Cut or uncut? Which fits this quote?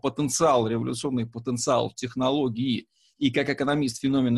uncut